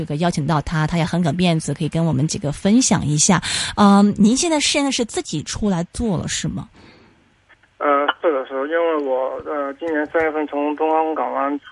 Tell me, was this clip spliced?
no; 0 cuts

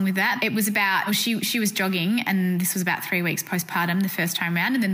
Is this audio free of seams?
yes; 0 cuts

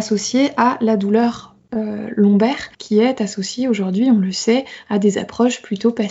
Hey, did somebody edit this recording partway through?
yes; 1 cut; at 2.7 s

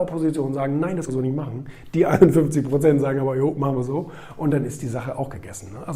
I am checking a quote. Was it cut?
yes; 1 cut; at 1.1 s

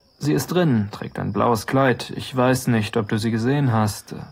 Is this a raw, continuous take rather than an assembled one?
yes; 0 cuts

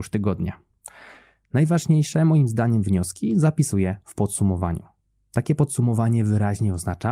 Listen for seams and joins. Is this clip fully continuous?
yes; 0 cuts

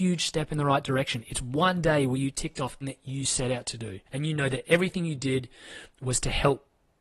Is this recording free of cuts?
no; 2 cuts; at 2.8 s, 4.1 s

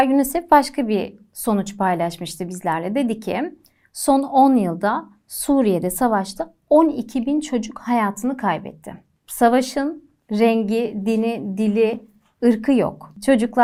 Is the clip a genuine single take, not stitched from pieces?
yes; 0 cuts

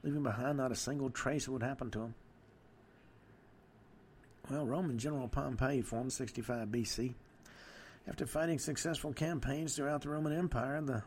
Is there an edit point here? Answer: yes; 1 cut; at 6.1 s

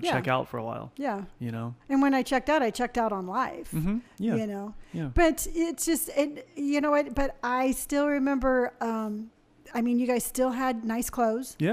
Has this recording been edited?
yes; 1 cut; at 1.8 s

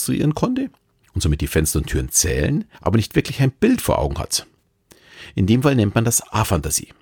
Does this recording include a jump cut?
yes; 1 cut; at 2.7 s

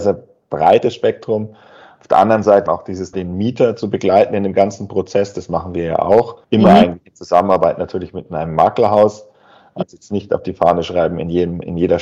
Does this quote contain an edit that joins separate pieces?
yes; 4 cuts; at 2.7 s, 3.1 s, 6.4 s, 9.8 s

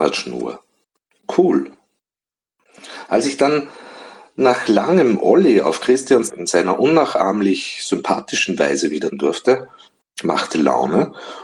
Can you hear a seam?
yes; 2 cuts; at 6.3 s, 9.1 s

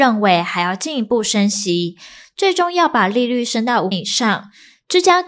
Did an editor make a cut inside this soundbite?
yes; 1 cut; at 3.9 s

